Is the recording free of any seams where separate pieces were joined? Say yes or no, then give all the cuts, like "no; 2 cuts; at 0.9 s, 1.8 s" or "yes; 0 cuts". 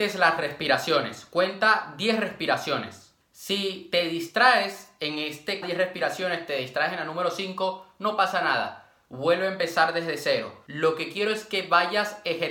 no; 1 cut; at 5.6 s